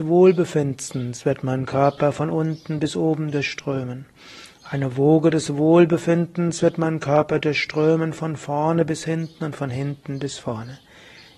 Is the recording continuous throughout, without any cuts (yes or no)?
yes